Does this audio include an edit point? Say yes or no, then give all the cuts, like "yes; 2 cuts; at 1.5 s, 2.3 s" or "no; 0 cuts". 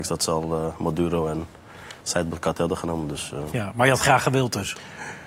no; 0 cuts